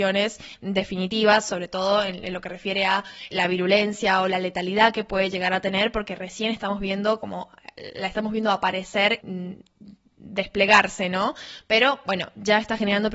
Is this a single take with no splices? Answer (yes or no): no